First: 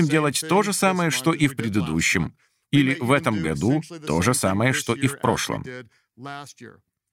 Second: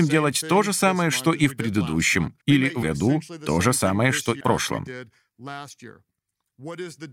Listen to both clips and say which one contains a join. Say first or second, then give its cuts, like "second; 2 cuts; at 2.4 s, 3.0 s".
second; 3 cuts; at 2.4 s, 2.8 s, 4.4 s